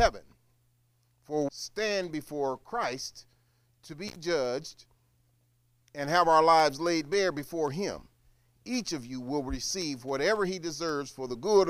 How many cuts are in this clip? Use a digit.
1